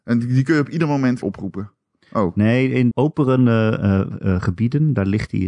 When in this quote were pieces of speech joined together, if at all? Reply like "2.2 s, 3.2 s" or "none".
1.2 s, 2.9 s